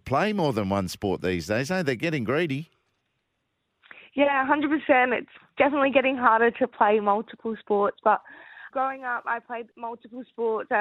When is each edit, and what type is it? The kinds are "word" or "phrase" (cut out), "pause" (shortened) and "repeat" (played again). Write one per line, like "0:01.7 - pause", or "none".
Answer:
0:08.7 - word
0:09.7 - pause

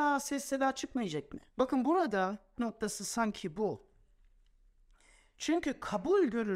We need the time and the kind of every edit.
0:01.5 - pause
0:02.6 - phrase

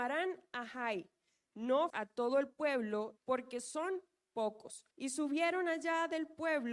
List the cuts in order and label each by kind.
0:01.9 - word
0:03.2 - phrase
0:04.9 - pause

